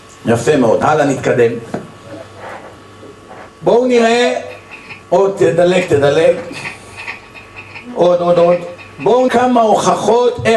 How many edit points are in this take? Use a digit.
4